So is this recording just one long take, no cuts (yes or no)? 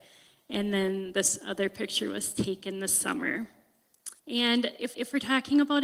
no